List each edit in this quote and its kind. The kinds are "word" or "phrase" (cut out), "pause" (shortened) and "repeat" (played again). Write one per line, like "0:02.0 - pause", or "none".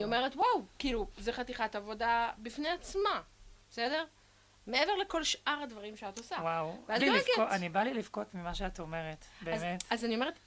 0:03.6 - pause
0:07.0 - word